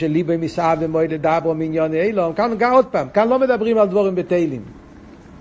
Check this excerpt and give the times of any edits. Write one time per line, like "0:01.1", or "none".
none